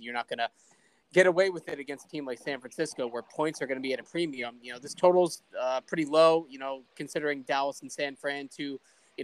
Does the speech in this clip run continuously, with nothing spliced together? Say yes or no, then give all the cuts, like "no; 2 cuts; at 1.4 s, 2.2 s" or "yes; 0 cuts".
yes; 0 cuts